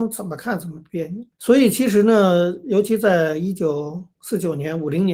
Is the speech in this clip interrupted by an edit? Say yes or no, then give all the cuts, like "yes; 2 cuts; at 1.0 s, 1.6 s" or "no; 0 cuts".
yes; 1 cut; at 1.3 s